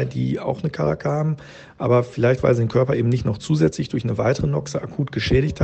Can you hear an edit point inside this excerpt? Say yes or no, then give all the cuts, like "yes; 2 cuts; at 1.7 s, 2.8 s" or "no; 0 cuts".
no; 0 cuts